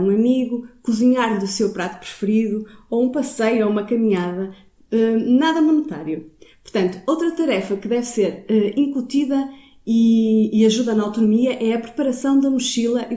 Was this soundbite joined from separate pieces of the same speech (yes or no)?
no